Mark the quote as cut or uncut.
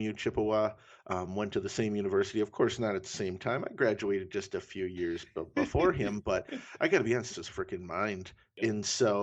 cut